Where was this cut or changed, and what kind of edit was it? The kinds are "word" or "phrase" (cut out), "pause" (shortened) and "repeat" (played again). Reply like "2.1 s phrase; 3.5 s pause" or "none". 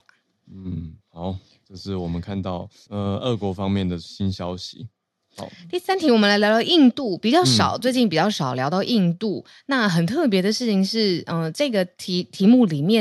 1.0 s pause